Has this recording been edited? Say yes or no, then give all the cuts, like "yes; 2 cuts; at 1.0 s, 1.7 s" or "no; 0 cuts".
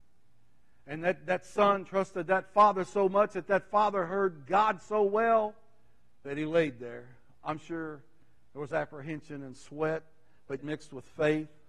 yes; 1 cut; at 10.6 s